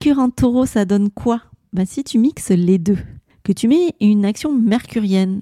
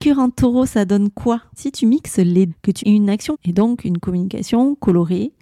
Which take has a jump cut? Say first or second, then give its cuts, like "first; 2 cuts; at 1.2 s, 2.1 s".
second; 4 cuts; at 1.6 s, 2.5 s, 2.8 s, 3.3 s